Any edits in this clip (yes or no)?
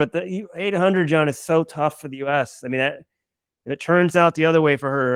no